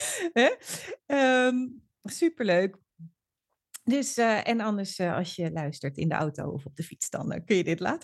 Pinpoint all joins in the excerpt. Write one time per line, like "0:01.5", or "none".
0:01.9